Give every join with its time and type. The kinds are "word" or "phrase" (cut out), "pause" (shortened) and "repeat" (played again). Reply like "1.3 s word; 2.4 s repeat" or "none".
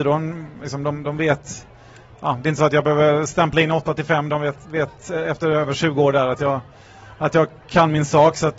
none